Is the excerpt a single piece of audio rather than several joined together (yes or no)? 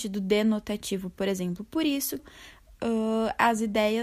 no